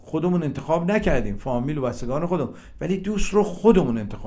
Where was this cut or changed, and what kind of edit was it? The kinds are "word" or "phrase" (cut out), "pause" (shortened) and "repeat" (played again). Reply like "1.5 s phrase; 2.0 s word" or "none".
none